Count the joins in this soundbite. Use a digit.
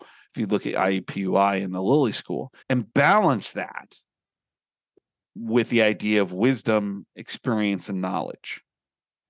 1